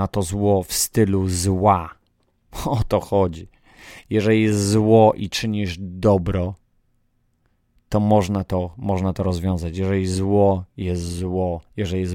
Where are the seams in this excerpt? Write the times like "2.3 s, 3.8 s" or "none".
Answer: none